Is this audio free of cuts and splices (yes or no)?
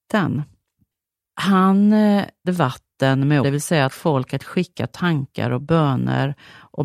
no